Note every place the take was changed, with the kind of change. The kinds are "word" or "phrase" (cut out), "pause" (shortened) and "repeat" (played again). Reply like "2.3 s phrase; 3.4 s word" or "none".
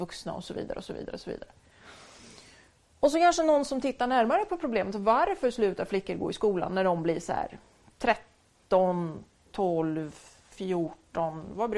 none